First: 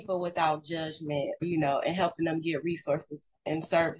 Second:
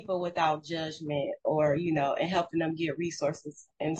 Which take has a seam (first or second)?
first